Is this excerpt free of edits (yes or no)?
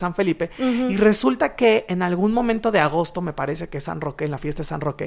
yes